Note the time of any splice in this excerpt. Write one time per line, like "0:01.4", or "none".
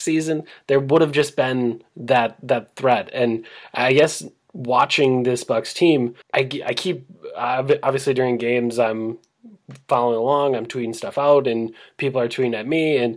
0:06.2